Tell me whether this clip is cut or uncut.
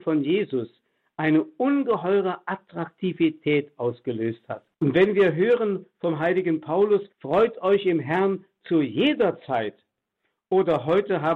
cut